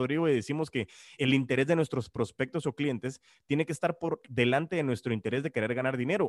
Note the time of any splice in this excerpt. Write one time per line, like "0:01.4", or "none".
0:01.2